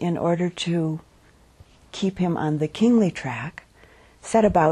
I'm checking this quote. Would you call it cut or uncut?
uncut